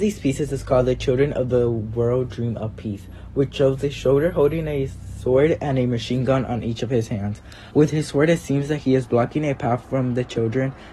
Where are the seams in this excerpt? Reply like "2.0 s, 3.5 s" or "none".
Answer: 7.7 s